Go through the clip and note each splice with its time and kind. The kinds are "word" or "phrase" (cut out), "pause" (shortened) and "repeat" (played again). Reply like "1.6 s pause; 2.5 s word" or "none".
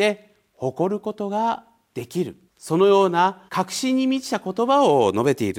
2.5 s pause; 3.5 s pause